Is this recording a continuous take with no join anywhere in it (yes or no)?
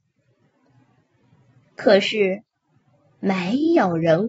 yes